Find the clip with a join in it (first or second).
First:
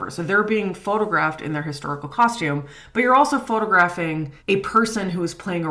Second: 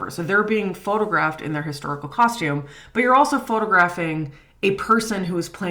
first